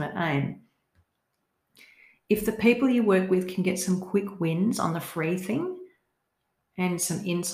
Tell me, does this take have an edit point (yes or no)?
no